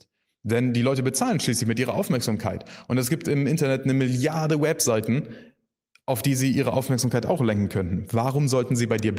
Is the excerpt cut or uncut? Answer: uncut